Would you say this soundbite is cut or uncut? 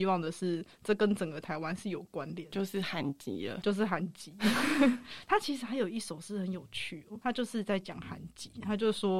cut